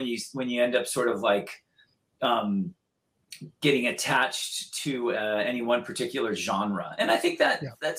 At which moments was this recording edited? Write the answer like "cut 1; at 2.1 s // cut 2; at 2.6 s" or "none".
none